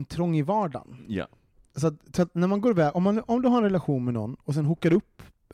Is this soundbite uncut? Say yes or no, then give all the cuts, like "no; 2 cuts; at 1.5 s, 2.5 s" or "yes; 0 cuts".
yes; 0 cuts